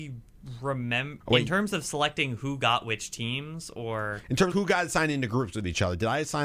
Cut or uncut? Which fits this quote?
cut